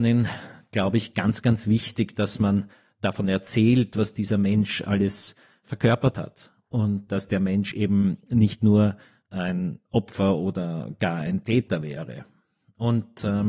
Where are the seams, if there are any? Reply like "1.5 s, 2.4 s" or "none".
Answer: none